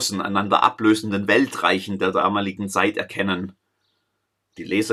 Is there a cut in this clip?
no; 0 cuts

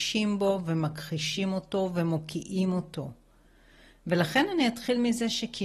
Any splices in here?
no; 0 cuts

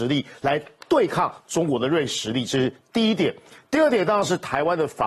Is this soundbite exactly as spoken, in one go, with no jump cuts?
yes; 0 cuts

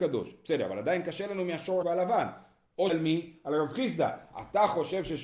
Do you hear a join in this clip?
yes; 2 cuts; at 1.8 s, 2.9 s

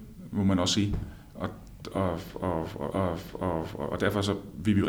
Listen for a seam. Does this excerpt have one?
yes; 1 cut; at 2.9 s

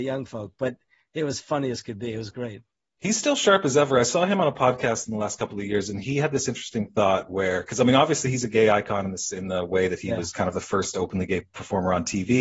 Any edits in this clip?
no; 0 cuts

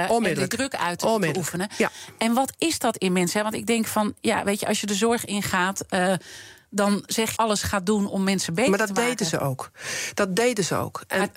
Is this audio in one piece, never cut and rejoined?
no; 1 cut; at 7.4 s

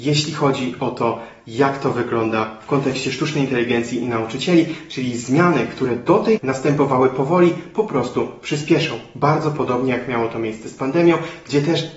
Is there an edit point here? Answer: yes; 1 cut; at 6.4 s

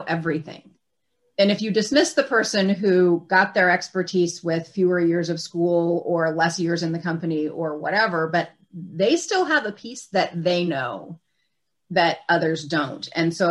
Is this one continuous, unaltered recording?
yes; 0 cuts

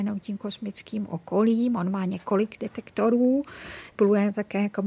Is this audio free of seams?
yes; 0 cuts

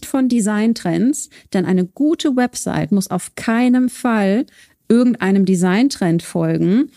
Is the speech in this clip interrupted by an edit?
no; 0 cuts

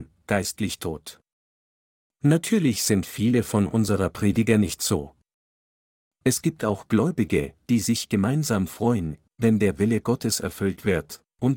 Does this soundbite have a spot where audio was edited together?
no; 0 cuts

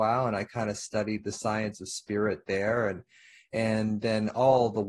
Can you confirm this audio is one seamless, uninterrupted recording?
yes; 0 cuts

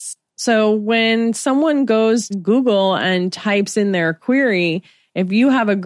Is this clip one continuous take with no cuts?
no; 1 cut; at 2.3 s

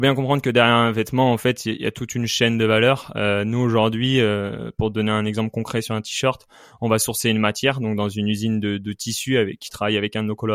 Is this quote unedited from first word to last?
yes; 0 cuts

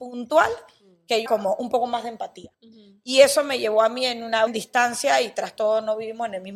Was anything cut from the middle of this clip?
yes; 3 cuts; at 1.3 s, 2.5 s, 4.5 s

